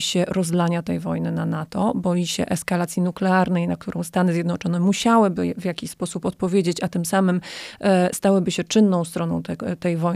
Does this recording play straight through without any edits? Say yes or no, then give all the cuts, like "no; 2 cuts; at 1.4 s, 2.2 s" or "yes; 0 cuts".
yes; 0 cuts